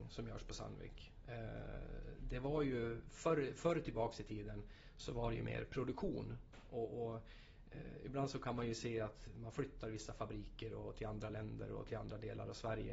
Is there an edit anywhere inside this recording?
no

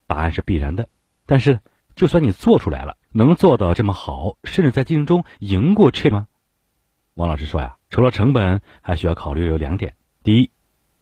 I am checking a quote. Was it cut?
yes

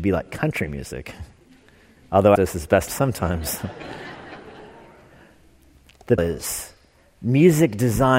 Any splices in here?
yes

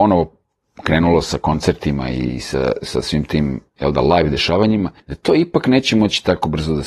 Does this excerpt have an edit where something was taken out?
yes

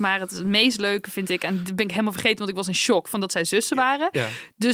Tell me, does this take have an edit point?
no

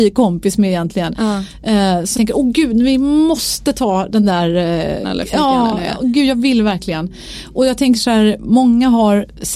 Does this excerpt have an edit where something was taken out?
yes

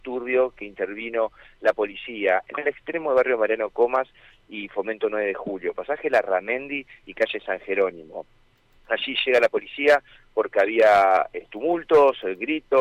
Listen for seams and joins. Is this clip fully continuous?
yes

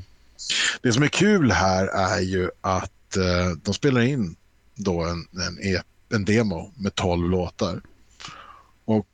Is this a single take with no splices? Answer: yes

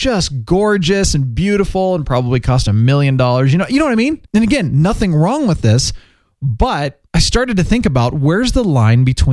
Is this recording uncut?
no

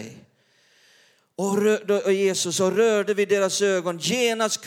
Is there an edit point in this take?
no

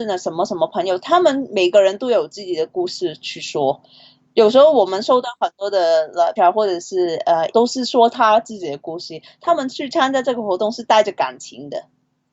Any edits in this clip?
yes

